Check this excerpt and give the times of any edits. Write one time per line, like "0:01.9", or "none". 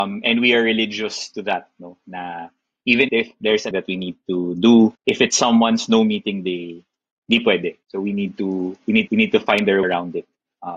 0:03.1
0:03.7
0:05.0
0:07.8
0:09.1
0:09.8